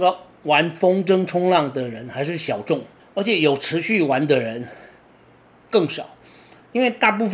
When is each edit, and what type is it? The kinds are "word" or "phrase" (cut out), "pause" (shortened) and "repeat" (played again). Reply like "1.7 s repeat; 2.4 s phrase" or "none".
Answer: 3.0 s word